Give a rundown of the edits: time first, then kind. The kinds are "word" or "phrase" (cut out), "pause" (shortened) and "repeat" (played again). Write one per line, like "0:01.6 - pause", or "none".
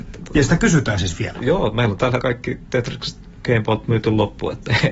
0:02.2 - word